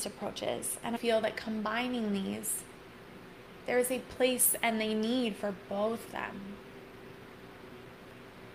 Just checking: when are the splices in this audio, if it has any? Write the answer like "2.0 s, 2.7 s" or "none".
1.0 s, 6.1 s